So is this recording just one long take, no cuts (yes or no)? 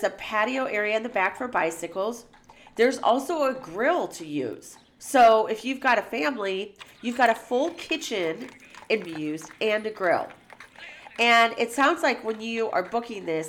no